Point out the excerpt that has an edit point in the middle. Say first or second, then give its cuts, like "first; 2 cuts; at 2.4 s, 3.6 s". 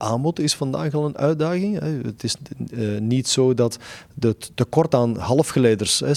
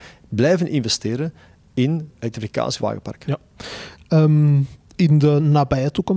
second; 2 cuts; at 2.1 s, 2.8 s